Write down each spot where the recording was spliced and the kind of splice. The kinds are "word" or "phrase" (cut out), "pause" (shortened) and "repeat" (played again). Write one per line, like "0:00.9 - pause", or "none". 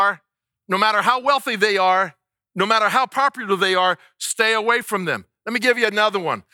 none